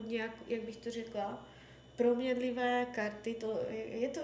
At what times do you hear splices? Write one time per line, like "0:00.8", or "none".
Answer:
none